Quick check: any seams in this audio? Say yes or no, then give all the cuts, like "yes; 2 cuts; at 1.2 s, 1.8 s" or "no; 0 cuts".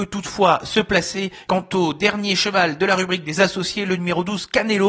no; 0 cuts